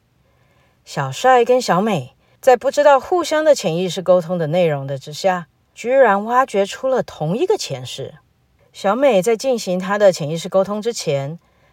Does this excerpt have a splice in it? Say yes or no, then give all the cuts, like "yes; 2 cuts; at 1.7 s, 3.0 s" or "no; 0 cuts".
no; 0 cuts